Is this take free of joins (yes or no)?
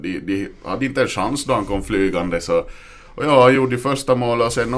yes